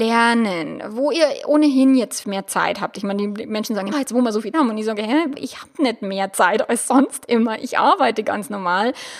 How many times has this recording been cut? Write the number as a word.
four